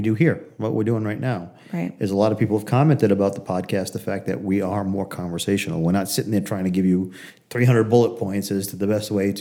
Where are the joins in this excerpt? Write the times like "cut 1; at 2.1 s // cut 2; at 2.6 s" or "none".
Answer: none